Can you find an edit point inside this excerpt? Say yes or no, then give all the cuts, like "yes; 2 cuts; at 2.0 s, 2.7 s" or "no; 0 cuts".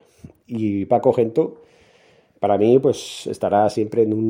no; 0 cuts